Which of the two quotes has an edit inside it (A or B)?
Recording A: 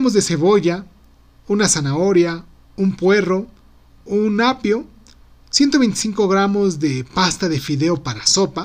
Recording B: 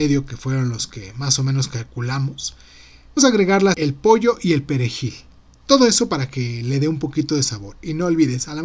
B